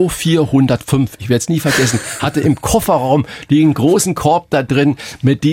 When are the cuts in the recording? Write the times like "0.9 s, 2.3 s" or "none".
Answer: none